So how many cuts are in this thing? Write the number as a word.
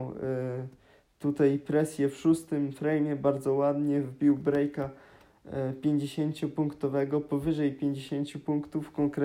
zero